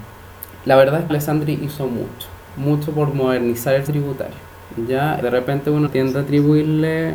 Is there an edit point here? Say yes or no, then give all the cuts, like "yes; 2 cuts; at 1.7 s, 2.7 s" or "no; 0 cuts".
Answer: yes; 5 cuts; at 1.1 s, 2.5 s, 3.9 s, 5.2 s, 5.9 s